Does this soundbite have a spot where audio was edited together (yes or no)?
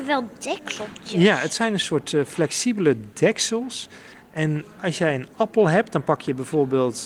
no